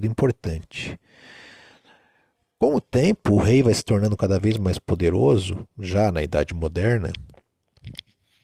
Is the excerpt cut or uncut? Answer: uncut